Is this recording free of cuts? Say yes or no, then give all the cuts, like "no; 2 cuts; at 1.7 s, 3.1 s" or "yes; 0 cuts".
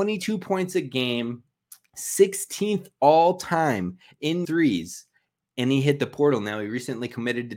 no; 1 cut; at 4.4 s